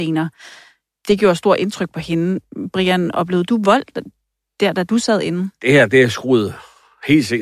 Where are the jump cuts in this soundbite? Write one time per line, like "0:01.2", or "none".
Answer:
none